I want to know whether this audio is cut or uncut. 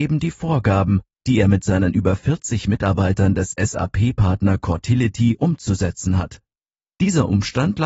uncut